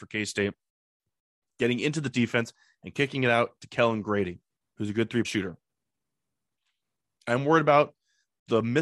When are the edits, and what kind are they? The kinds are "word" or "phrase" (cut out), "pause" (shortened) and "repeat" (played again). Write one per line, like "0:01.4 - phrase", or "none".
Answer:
0:02.1 - phrase
0:04.6 - pause
0:05.2 - word